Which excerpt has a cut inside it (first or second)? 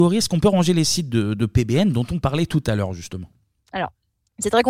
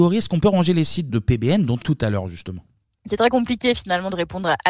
second